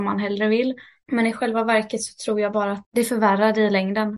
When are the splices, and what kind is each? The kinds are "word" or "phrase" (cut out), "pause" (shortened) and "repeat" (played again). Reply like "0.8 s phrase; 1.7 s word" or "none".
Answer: none